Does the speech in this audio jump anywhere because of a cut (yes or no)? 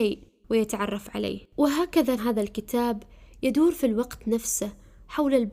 yes